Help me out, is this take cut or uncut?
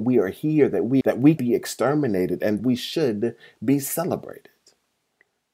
cut